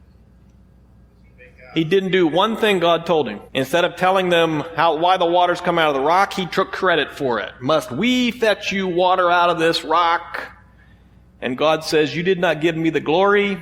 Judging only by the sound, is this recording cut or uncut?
cut